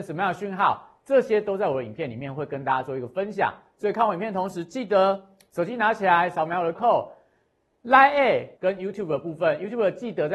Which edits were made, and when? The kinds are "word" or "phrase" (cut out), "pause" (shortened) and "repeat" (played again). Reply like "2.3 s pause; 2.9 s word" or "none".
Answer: 6.8 s word; 8.6 s word